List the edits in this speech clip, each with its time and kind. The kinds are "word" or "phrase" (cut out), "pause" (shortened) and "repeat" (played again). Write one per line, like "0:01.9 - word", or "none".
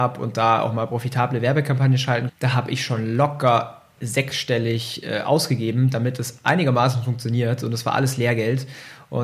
0:02.3 - word